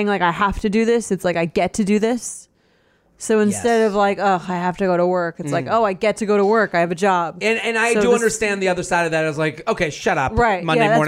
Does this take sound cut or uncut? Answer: uncut